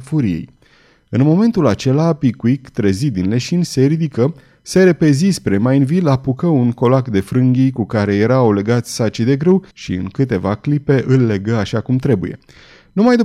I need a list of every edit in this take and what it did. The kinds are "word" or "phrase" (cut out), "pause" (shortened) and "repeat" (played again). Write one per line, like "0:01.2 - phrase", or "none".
0:09.7 - pause